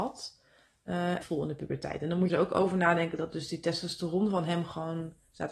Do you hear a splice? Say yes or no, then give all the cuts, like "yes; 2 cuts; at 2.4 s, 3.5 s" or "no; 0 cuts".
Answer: yes; 2 cuts; at 1.2 s, 2.3 s